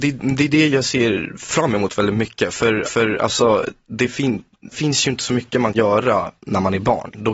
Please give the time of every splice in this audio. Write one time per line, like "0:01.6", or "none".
0:02.8
0:04.7
0:05.7